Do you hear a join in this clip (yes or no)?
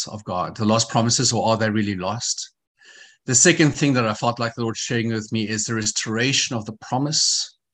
no